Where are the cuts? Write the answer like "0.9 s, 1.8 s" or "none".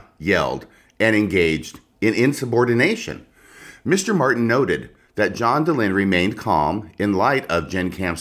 none